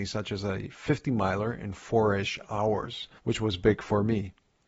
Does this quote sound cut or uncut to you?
cut